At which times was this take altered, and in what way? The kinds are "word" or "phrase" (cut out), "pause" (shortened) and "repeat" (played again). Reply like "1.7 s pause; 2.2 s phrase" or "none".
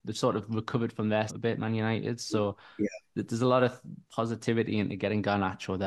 1.3 s word; 4.1 s pause